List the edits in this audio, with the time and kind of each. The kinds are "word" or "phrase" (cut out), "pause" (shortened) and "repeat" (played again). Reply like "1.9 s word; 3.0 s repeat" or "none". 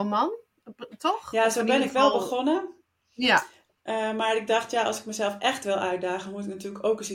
none